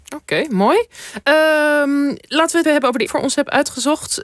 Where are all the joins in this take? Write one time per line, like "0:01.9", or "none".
0:02.2
0:02.6
0:03.1